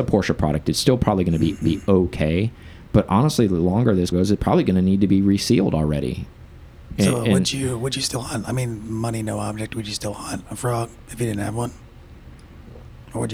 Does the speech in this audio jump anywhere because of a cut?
yes; 2 cuts; at 1.6 s, 4.1 s

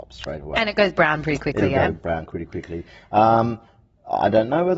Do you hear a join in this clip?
no; 0 cuts

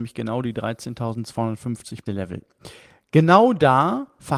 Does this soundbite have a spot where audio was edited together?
yes; 1 cut; at 2.1 s

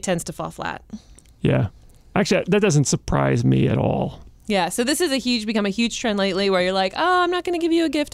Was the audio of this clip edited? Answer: no; 0 cuts

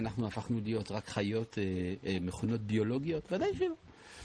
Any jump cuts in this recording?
no; 0 cuts

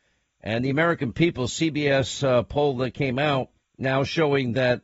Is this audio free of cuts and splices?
no; 1 cut; at 3.6 s

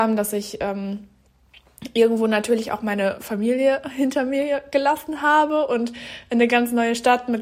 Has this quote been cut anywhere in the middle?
no; 0 cuts

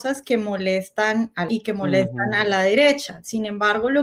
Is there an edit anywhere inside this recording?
yes; 1 cut; at 1.5 s

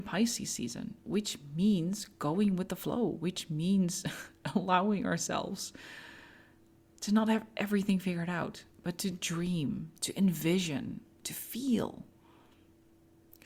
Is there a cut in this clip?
no; 0 cuts

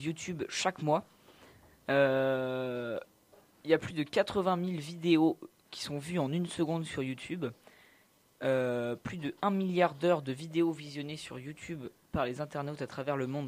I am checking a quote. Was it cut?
no; 0 cuts

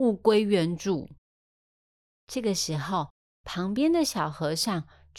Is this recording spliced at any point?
no; 0 cuts

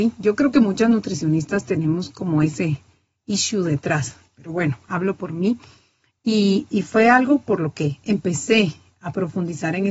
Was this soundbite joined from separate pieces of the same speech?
no; 0 cuts

